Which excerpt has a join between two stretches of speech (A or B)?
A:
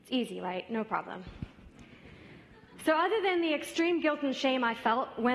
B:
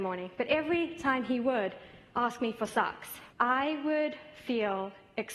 B